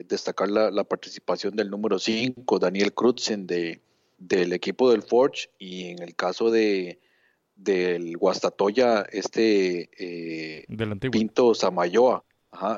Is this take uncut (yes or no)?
yes